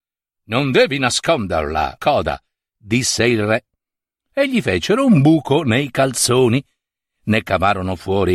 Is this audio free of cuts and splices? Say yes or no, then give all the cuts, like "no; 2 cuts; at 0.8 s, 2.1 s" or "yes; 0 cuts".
no; 1 cut; at 2.0 s